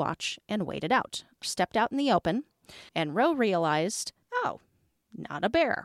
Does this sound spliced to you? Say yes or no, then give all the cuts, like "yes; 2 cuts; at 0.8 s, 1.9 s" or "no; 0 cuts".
yes; 3 cuts; at 1.4 s, 2.9 s, 4.2 s